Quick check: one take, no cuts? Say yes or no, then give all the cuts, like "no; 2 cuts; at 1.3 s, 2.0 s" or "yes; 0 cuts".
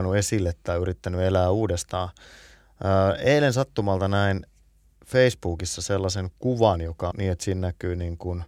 no; 1 cut; at 7.1 s